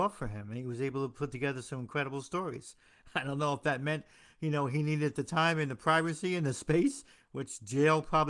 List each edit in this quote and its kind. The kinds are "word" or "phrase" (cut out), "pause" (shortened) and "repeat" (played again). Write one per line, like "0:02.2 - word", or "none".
none